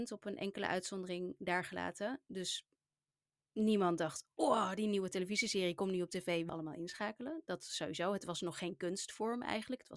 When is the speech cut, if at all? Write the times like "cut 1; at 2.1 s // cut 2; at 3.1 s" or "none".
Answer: cut 1; at 6.5 s